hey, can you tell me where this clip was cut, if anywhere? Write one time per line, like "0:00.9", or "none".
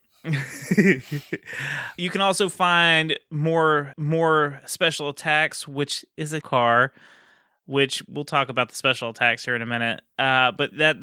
0:02.0
0:03.9
0:06.4